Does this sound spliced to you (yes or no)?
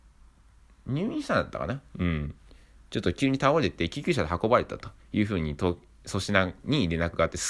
no